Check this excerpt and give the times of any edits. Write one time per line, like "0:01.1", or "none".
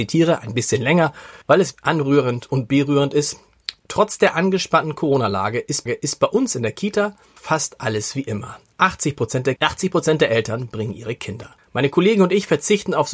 0:01.4
0:01.7
0:05.9
0:07.4
0:09.6
0:11.6